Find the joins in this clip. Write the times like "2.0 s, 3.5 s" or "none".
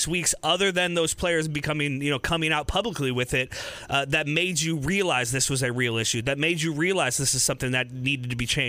none